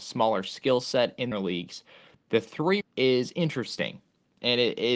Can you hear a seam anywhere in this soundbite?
yes; 2 cuts; at 1.3 s, 2.8 s

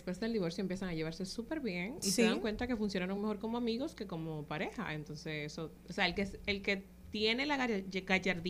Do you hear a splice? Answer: no; 0 cuts

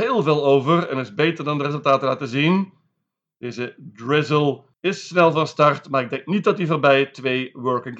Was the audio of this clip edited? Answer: no; 0 cuts

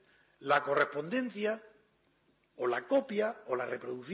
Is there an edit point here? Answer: no; 0 cuts

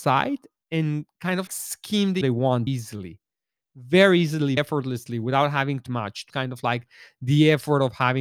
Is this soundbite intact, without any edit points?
no; 6 cuts; at 1.5 s, 2.2 s, 2.7 s, 4.6 s, 5.9 s, 6.3 s

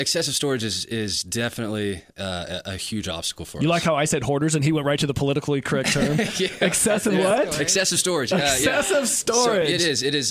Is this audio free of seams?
yes; 0 cuts

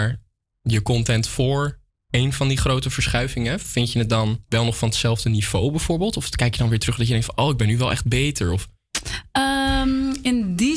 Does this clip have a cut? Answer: no; 0 cuts

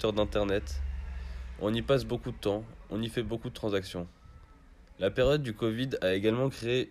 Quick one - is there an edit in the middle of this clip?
no; 0 cuts

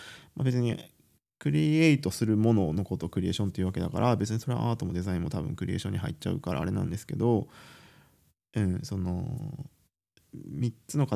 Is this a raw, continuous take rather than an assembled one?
yes; 0 cuts

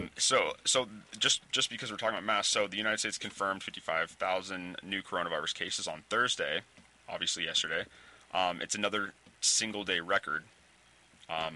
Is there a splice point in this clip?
no; 0 cuts

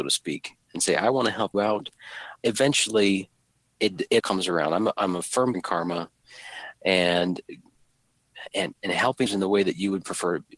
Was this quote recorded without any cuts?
no; 5 cuts; at 1.5 s, 2.4 s, 4.2 s, 5.5 s, 9.3 s

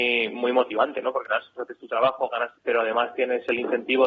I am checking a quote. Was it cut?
yes; 3 cuts; at 1.2 s, 1.6 s, 2.5 s

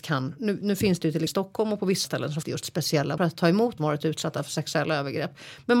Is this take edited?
yes; 5 cuts; at 1.3 s, 2.0 s, 2.4 s, 3.2 s, 3.8 s

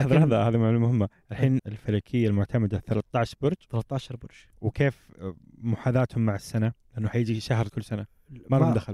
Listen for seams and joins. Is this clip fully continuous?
no; 3 cuts; at 1.6 s, 4.6 s, 7.7 s

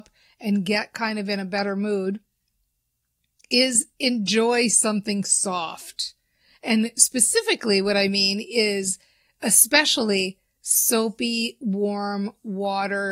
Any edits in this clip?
no; 0 cuts

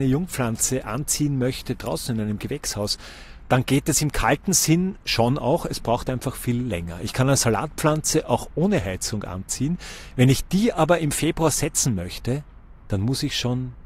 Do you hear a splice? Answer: no; 0 cuts

